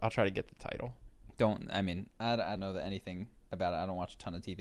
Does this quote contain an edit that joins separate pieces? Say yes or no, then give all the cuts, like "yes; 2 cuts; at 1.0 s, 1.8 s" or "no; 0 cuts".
yes; 3 cuts; at 1.2 s, 2.1 s, 2.6 s